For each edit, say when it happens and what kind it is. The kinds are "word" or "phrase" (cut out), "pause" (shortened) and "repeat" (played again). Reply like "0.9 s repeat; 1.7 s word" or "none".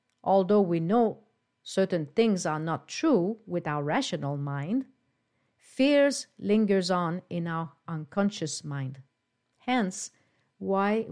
none